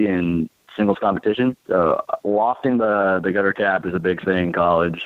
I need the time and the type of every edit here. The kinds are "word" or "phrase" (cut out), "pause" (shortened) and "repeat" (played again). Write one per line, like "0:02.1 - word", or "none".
0:01.6 - pause